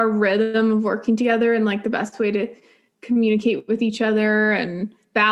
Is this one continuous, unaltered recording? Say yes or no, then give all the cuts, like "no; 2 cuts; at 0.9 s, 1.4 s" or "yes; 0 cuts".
yes; 0 cuts